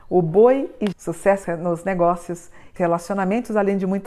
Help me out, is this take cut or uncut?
cut